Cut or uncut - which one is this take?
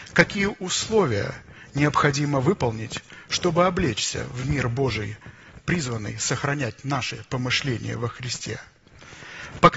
uncut